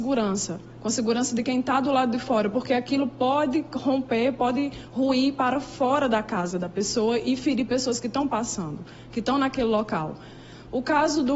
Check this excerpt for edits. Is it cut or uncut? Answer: uncut